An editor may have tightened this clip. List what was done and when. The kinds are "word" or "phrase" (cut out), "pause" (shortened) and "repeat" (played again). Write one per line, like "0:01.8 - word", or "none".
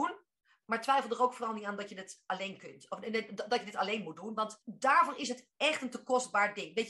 0:04.6 - pause